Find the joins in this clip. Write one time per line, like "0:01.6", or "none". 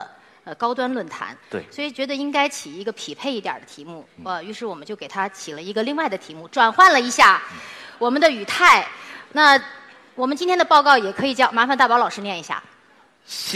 none